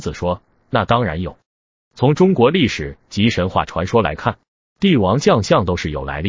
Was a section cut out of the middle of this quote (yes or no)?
no